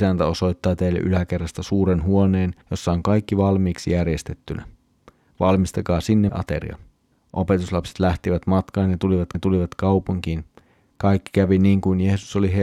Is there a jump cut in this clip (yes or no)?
yes